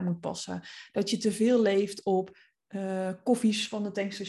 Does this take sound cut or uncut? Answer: uncut